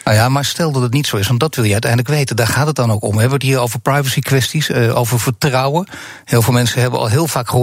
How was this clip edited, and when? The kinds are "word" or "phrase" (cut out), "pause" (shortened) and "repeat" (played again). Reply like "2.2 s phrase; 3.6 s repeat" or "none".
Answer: none